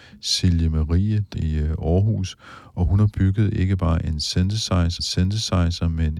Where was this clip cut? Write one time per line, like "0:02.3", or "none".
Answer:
0:01.3
0:05.0